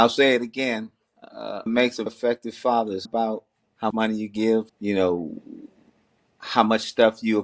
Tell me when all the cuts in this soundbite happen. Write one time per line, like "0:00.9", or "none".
0:01.7
0:02.1
0:03.1
0:03.9
0:04.7